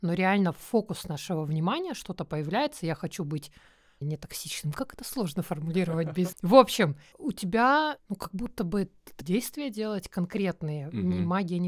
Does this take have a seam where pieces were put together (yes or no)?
yes